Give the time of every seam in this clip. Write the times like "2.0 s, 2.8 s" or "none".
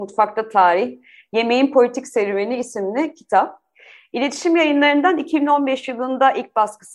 none